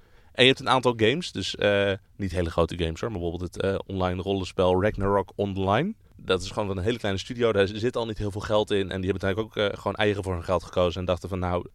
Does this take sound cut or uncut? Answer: cut